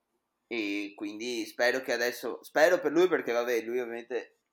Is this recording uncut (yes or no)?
yes